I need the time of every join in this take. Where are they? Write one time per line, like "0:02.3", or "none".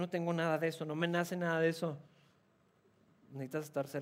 none

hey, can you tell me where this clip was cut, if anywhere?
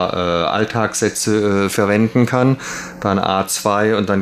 none

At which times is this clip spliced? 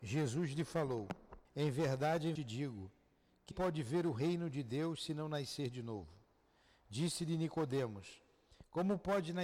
0:01.5
0:02.4
0:03.5

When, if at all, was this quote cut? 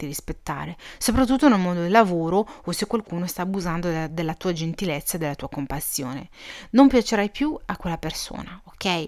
none

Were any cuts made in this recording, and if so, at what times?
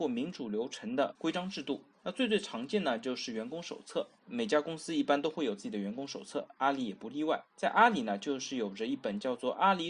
0:01.9
0:04.2
0:07.5

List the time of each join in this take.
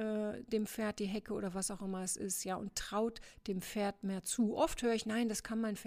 none

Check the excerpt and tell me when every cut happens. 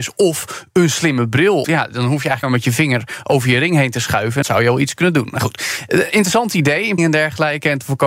0:01.6
0:02.4
0:04.4
0:07.0

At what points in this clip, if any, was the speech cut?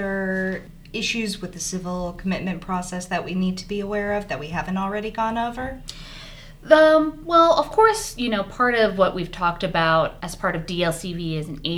0:10.2

